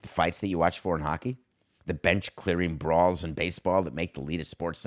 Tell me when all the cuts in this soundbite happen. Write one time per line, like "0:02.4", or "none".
none